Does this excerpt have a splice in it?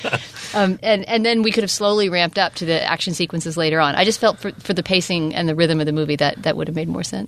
no; 0 cuts

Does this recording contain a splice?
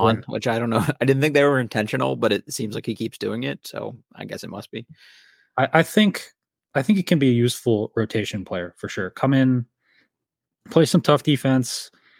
no; 0 cuts

